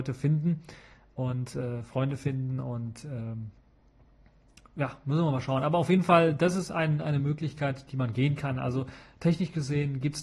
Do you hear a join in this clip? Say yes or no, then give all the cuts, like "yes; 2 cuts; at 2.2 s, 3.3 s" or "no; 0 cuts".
no; 0 cuts